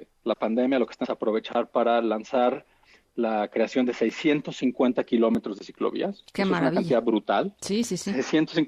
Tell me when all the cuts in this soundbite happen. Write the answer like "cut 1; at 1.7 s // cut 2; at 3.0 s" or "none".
cut 1; at 1.0 s